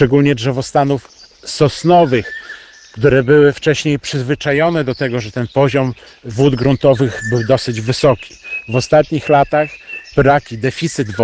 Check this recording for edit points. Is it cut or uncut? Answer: uncut